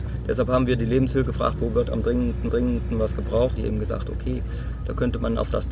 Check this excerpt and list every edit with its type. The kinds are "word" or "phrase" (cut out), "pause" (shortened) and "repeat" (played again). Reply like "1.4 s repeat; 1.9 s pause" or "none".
1.3 s word; 2.5 s repeat; 3.6 s phrase